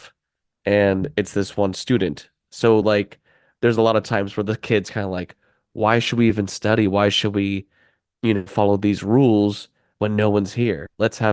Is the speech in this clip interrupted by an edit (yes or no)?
no